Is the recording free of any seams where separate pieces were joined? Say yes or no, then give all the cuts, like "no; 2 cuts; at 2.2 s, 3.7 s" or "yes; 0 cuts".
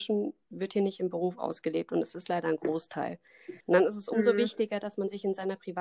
no; 1 cut; at 3.6 s